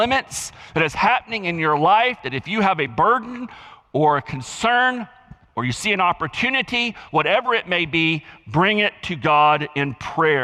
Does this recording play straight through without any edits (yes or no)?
yes